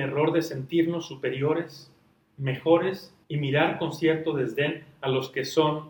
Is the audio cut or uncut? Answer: cut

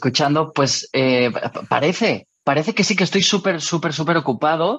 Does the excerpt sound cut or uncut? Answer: uncut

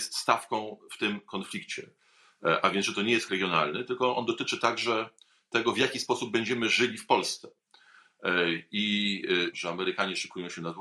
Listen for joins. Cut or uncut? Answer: cut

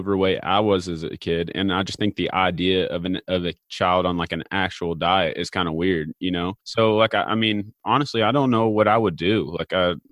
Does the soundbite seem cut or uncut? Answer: cut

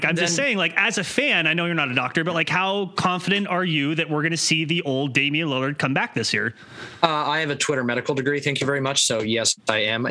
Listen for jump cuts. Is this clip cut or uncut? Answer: uncut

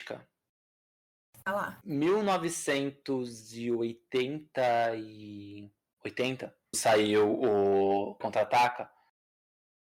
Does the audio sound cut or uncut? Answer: cut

